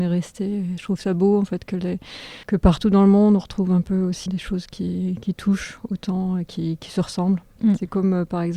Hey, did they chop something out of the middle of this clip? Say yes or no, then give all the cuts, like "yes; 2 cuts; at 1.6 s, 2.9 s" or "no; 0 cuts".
yes; 2 cuts; at 2.4 s, 4.3 s